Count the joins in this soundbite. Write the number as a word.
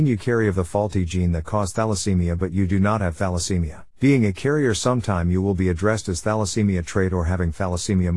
one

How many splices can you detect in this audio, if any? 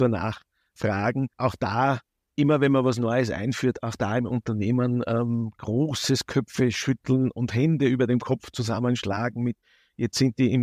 two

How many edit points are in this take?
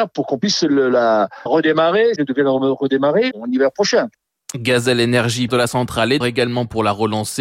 five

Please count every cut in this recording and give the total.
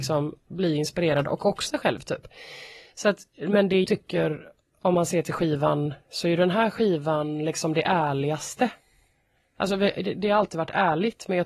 two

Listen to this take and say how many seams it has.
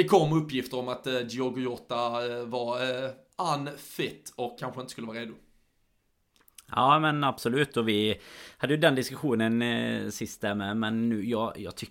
one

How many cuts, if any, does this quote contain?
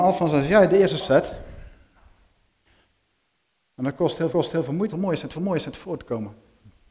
four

